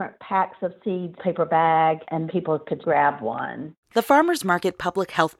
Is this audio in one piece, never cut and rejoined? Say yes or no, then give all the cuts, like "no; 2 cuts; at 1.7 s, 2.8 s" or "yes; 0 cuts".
no; 4 cuts; at 1.2 s, 2.3 s, 2.8 s, 3.8 s